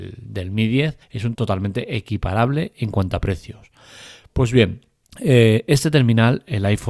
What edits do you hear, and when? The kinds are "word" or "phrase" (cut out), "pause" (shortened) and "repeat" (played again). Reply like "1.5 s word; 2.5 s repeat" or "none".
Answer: 1.0 s pause; 1.3 s word; 5.0 s pause